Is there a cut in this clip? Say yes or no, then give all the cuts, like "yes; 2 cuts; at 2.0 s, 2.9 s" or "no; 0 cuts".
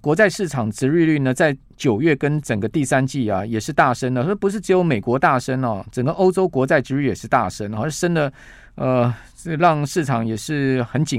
no; 0 cuts